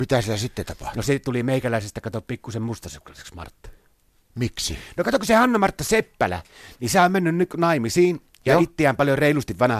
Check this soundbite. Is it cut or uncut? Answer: uncut